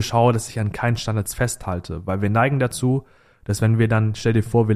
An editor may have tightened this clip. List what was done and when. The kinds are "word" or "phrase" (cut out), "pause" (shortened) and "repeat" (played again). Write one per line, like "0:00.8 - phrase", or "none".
none